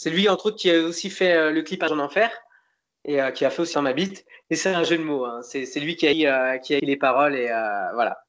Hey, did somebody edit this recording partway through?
yes; 4 cuts; at 1.9 s, 3.7 s, 6.1 s, 6.8 s

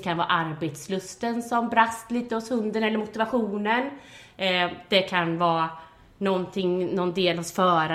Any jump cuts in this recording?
no; 0 cuts

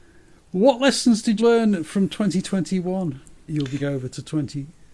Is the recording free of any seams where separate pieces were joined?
no; 3 cuts; at 1.4 s, 3.5 s, 3.8 s

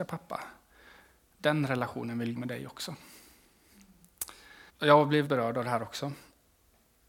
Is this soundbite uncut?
no; 3 cuts; at 2.4 s, 4.7 s, 5.3 s

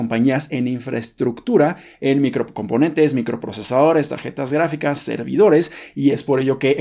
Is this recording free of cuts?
yes; 0 cuts

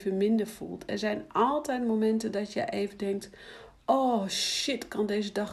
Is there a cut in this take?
no; 0 cuts

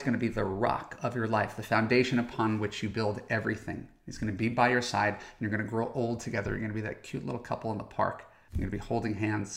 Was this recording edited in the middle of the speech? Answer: no; 0 cuts

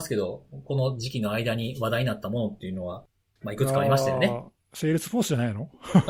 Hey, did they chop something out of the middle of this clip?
no; 0 cuts

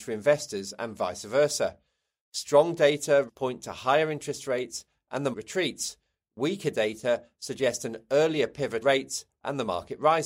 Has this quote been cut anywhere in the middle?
yes; 3 cuts; at 3.3 s, 5.3 s, 8.8 s

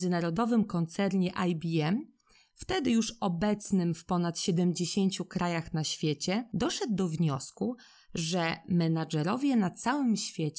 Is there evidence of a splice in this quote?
no; 0 cuts

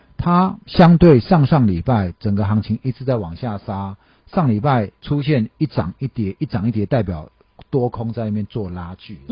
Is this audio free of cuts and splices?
no; 1 cut; at 5.0 s

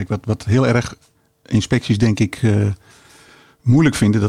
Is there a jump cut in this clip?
no; 0 cuts

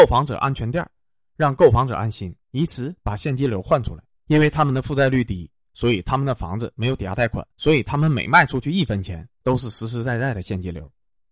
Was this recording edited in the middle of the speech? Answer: yes; 3 cuts; at 2.4 s, 4.1 s, 7.5 s

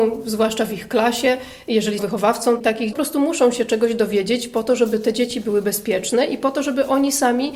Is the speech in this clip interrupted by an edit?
yes; 2 cuts; at 2.0 s, 2.9 s

